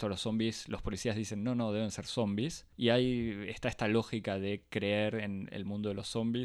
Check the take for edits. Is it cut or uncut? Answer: cut